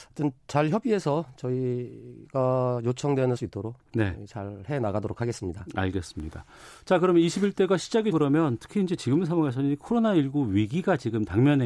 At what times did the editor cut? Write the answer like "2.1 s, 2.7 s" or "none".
3.4 s, 8.1 s